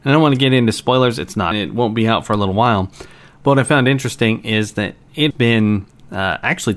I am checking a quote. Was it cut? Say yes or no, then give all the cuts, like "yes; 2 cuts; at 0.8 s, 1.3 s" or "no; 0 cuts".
yes; 2 cuts; at 1.5 s, 5.3 s